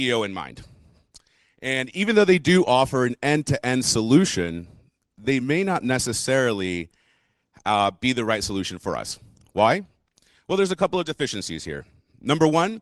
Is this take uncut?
yes; 0 cuts

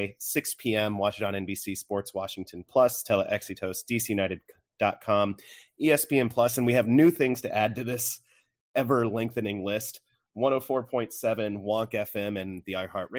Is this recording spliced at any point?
no; 0 cuts

